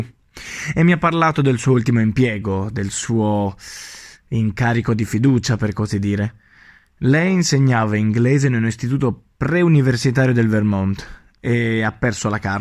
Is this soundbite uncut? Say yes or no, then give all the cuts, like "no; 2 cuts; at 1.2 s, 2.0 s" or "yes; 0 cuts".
yes; 0 cuts